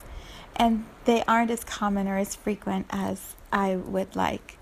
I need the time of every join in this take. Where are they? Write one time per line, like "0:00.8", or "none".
none